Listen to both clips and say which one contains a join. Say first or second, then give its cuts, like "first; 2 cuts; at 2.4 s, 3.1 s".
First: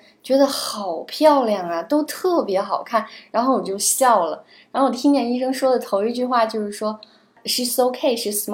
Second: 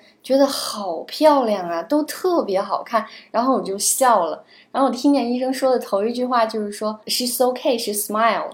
second; 1 cut; at 7.0 s